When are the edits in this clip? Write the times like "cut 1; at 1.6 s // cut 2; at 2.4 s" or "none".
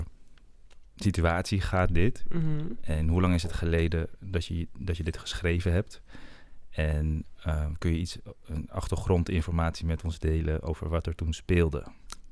none